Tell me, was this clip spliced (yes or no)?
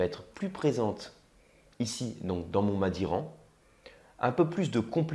no